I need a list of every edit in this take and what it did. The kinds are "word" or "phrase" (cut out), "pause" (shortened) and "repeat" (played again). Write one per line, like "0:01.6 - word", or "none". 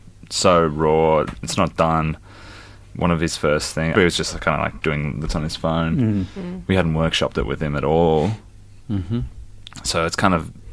0:03.9 - word
0:05.3 - word